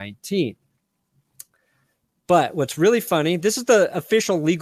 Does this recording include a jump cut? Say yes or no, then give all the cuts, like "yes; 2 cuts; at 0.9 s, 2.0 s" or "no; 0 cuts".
no; 0 cuts